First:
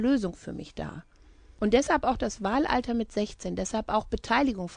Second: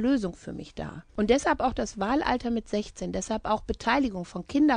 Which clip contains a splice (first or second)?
second